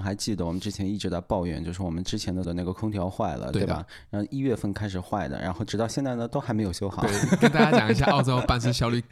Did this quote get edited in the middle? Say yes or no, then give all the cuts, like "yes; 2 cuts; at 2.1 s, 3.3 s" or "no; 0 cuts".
yes; 1 cut; at 2.4 s